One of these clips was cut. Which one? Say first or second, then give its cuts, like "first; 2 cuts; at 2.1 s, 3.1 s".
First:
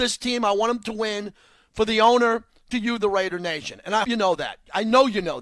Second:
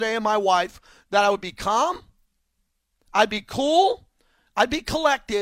first; 2 cuts; at 2.7 s, 4.0 s